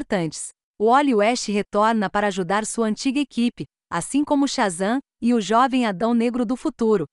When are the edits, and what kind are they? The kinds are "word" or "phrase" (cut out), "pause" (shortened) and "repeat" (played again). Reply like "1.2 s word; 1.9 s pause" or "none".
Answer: none

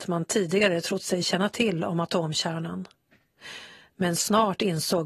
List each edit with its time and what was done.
none

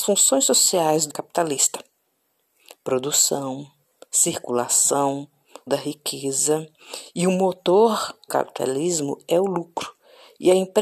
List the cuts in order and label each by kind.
1.1 s word; 5.7 s word; 8.3 s word

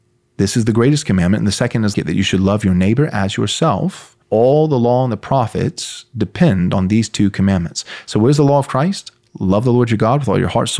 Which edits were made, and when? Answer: 1.9 s word; 4.2 s pause

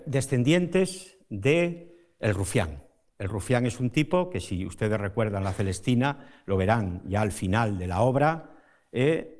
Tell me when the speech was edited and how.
none

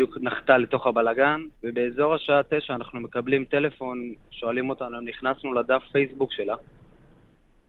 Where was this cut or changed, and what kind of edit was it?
1.6 s pause; 4.2 s pause

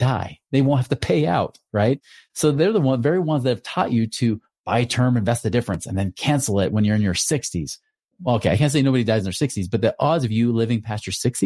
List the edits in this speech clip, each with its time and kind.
none

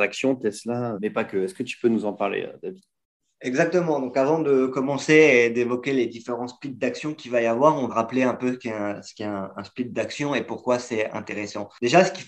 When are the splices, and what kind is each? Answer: 1.0 s word; 7.9 s word

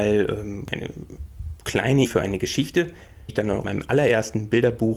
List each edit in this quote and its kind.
2.1 s word; 3.3 s word; 3.6 s word

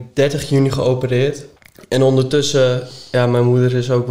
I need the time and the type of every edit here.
1.6 s pause

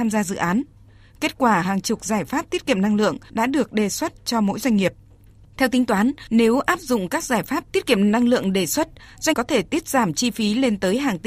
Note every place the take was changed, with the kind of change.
9.3 s word

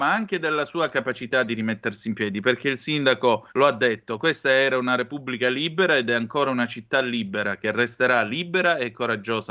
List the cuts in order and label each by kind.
3.5 s pause

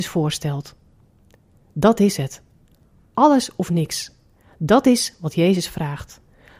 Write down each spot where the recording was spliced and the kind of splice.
none

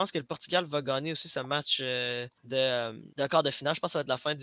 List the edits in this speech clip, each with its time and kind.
2.4 s pause; 3.1 s pause

